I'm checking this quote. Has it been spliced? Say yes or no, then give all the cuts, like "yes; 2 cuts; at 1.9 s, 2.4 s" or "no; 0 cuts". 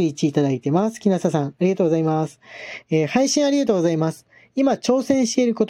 no; 0 cuts